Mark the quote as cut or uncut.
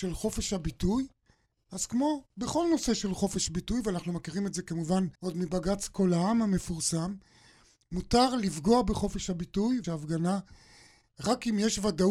cut